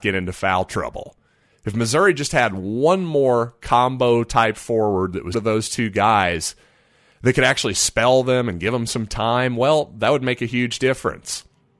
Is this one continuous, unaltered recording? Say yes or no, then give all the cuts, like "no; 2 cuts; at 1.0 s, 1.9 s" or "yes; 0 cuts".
no; 1 cut; at 5.3 s